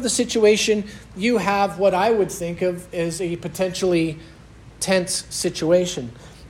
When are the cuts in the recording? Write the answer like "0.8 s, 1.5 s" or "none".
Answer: none